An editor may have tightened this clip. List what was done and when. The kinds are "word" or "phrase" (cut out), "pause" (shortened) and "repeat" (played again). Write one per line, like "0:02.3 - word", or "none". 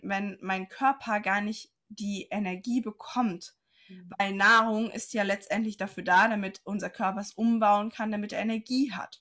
none

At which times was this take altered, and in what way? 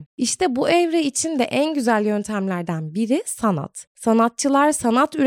none

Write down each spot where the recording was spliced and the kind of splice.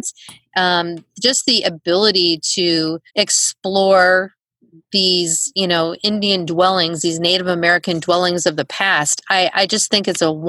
0:03.1 - pause

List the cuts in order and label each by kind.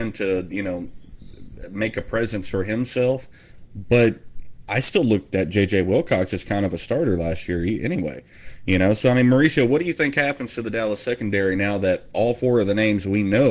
none

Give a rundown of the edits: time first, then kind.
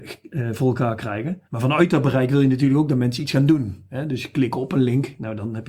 0:01.5 - pause

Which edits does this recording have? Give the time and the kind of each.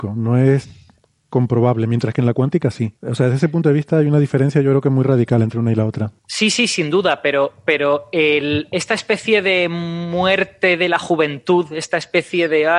0:03.0 - pause
0:06.2 - pause

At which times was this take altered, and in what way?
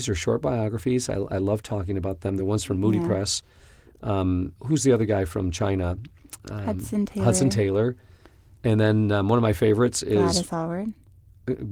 none

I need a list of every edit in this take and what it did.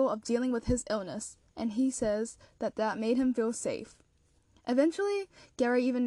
0:01.5 - pause

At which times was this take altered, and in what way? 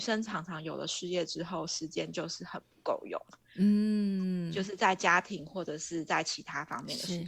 none

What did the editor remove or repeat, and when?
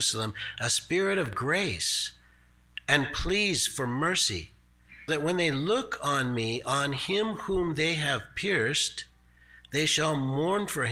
0:05.1 - word

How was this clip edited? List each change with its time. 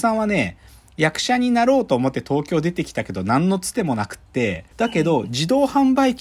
0:04.7 - pause

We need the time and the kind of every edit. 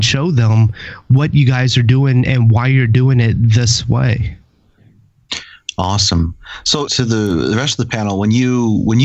0:06.9 - word

